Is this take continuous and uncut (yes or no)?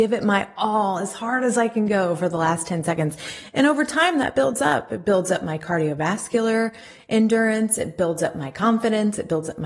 yes